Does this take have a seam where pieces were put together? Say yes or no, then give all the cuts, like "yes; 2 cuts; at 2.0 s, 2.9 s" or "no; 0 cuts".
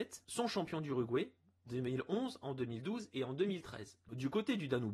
yes; 1 cut; at 1.7 s